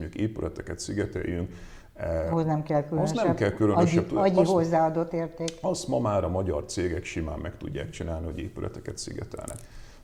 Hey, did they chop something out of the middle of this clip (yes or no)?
no